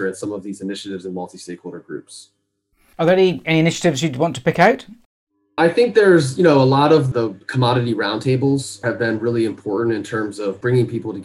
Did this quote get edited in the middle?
no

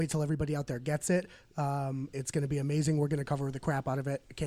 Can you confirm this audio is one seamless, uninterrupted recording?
yes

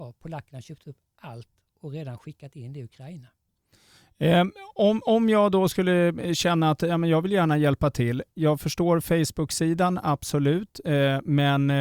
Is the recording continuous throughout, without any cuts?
yes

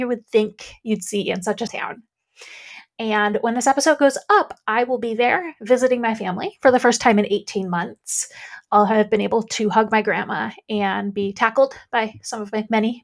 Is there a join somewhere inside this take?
yes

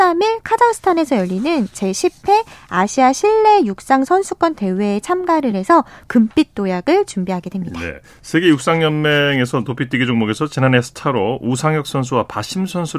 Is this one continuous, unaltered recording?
yes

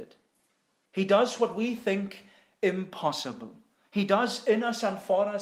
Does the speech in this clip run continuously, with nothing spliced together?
yes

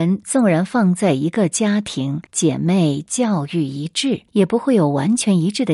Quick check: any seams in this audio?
yes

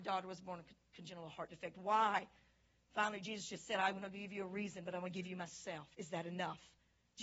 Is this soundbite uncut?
yes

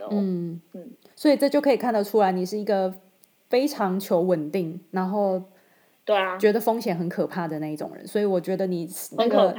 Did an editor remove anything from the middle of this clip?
no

